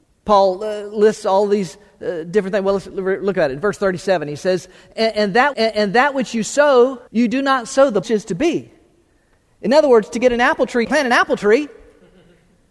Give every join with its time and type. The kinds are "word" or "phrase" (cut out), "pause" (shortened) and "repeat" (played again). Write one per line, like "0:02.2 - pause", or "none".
0:05.5 - repeat
0:07.1 - pause
0:08.0 - phrase
0:10.8 - phrase